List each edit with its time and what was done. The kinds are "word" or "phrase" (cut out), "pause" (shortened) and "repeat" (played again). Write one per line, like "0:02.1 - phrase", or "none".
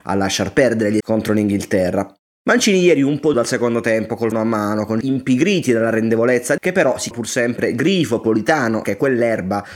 0:01.0 - word
0:03.3 - word
0:04.3 - word
0:05.0 - word
0:06.6 - word
0:07.1 - word
0:08.8 - word